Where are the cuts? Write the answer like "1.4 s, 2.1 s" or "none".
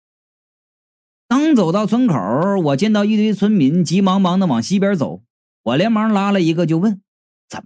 none